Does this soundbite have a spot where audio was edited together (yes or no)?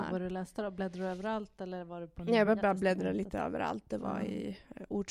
no